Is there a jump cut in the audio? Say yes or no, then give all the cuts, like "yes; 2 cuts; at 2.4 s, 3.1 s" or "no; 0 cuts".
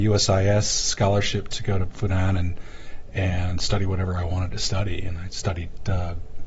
no; 0 cuts